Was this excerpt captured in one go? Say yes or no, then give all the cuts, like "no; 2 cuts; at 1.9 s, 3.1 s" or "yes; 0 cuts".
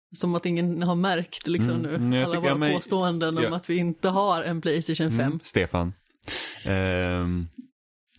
yes; 0 cuts